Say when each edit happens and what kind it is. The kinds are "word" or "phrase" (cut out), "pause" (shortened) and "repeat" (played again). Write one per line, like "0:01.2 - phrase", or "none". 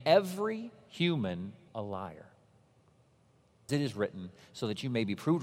0:01.7 - word
0:03.7 - word